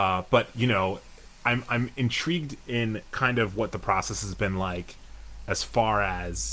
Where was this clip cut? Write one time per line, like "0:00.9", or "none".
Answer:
none